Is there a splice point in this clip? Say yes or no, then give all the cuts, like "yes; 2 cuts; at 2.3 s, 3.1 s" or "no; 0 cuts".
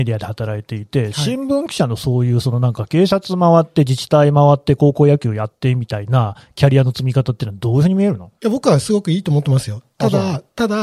yes; 1 cut; at 8.4 s